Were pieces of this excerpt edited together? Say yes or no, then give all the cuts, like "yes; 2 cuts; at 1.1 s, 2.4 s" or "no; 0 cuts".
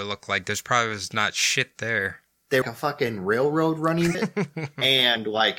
yes; 2 cuts; at 2.6 s, 4.1 s